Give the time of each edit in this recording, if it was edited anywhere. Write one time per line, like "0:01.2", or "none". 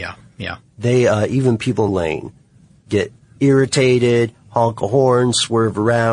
0:01.9